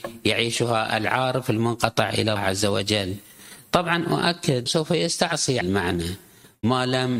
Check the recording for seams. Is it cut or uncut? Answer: cut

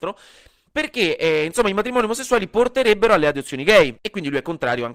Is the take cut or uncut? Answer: uncut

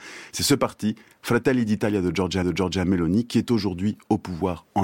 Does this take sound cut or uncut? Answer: cut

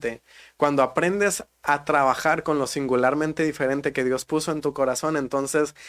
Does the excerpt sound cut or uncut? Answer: uncut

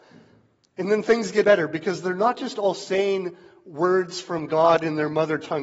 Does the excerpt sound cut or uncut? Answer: cut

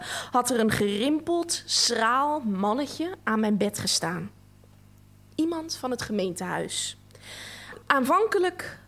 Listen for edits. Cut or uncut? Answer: uncut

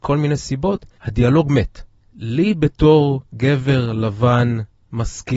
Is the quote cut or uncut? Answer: cut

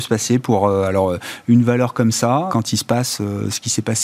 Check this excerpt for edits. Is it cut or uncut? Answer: cut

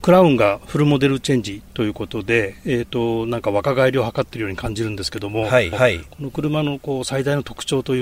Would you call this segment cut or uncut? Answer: cut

